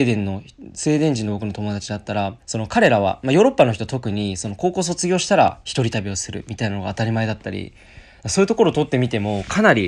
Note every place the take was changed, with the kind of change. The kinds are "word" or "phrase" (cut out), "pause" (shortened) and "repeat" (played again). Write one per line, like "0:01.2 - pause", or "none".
0:02.4 - pause